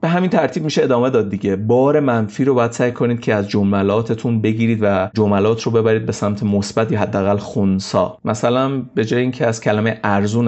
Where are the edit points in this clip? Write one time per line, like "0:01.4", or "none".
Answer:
none